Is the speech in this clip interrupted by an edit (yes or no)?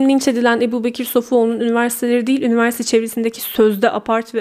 no